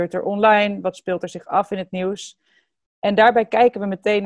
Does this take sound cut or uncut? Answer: uncut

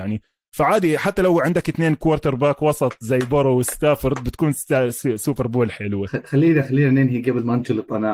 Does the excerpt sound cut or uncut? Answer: uncut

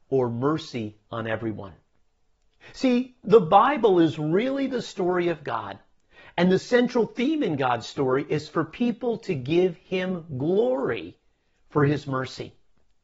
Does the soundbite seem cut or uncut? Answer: uncut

